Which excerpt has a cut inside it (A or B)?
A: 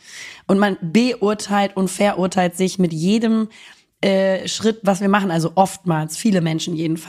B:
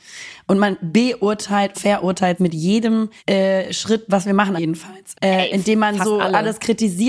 B